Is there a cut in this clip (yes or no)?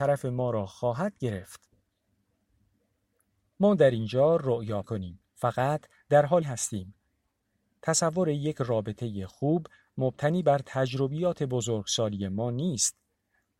yes